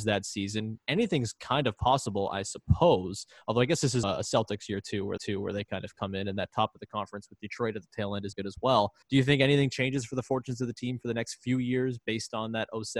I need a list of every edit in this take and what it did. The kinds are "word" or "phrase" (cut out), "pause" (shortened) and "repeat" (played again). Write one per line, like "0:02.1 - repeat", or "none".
0:04.0 - word
0:05.2 - repeat
0:08.3 - word
0:09.0 - pause